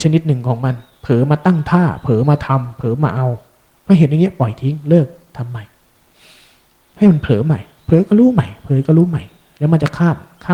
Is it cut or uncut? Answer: uncut